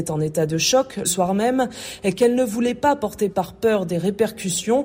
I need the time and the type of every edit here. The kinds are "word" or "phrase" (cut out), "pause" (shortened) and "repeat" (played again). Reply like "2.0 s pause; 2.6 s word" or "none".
1.0 s word; 3.3 s word